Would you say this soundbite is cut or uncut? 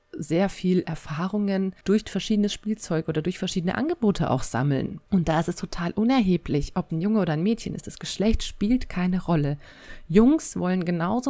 cut